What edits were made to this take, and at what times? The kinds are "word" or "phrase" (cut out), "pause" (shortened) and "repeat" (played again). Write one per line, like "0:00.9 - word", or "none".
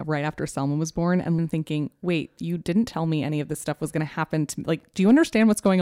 0:01.4 - phrase